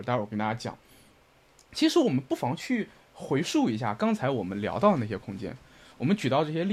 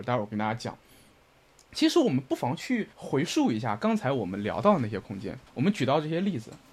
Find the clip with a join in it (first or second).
second